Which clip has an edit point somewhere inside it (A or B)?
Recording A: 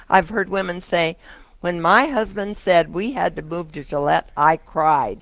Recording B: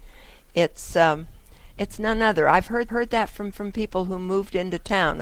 B